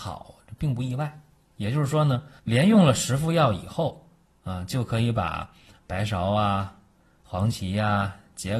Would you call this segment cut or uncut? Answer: cut